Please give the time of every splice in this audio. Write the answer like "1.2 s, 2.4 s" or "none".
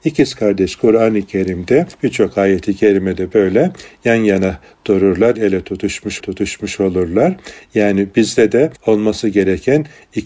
1.9 s, 5.3 s, 6.2 s, 8.8 s